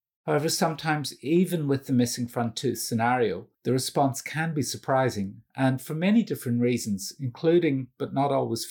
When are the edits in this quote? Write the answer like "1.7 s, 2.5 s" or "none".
3.5 s